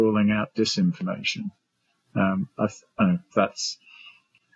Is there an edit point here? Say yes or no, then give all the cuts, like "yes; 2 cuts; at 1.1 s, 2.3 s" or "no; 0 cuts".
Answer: yes; 3 cuts; at 2.5 s, 3.0 s, 3.3 s